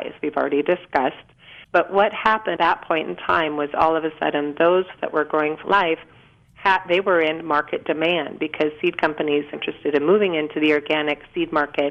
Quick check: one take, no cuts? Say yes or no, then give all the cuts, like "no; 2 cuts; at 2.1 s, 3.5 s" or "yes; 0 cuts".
no; 5 cuts; at 1.6 s, 2.6 s, 5.0 s, 5.6 s, 9.5 s